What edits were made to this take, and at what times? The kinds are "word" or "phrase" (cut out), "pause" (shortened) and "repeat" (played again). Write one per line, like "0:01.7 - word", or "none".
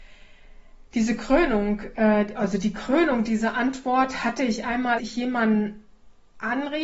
0:05.0 - word